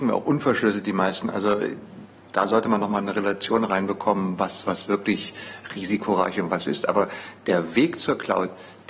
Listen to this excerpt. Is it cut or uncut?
uncut